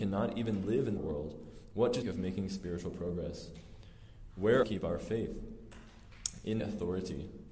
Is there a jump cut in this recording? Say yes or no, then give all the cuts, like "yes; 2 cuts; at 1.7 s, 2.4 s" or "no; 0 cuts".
yes; 4 cuts; at 1.0 s, 2.0 s, 4.6 s, 6.6 s